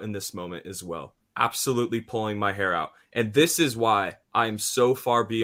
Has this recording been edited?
yes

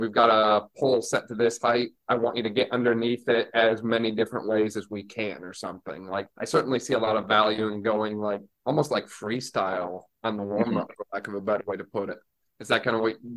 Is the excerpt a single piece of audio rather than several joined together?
no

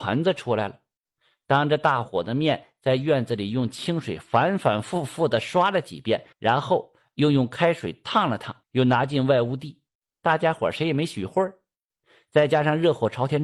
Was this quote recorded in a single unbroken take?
no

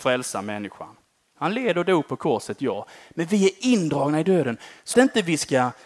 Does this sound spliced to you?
yes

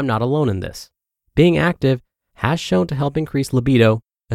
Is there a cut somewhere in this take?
no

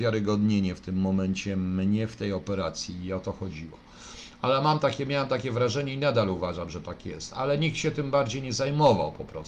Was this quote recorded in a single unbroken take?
yes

